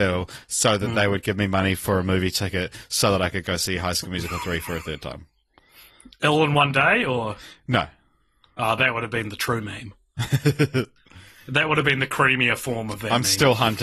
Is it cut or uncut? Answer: uncut